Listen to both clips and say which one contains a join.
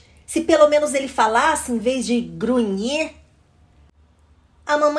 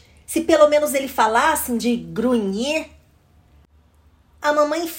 second; 1 cut; at 1.8 s

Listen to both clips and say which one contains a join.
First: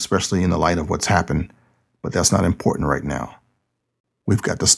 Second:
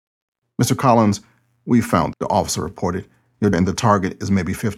second; 2 cuts; at 2.1 s, 3.5 s

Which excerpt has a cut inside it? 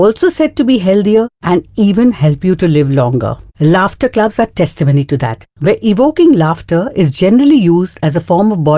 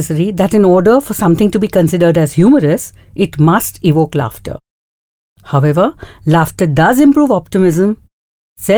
first; 3 cuts; at 1.3 s, 3.5 s, 5.5 s

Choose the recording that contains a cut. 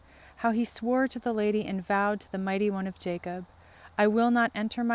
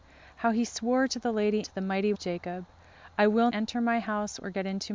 second; 3 cuts; at 1.6 s, 2.1 s, 3.5 s

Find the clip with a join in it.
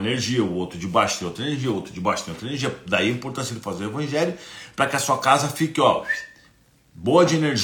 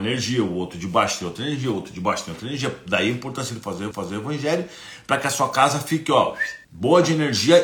second; 2 cuts; at 3.9 s, 6.6 s

